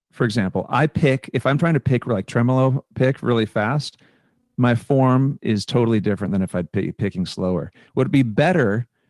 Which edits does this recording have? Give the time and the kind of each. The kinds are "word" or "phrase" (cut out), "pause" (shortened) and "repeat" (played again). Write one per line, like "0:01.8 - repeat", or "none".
none